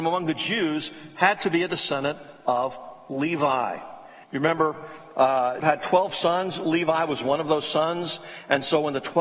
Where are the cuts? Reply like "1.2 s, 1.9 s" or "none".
4.2 s, 5.6 s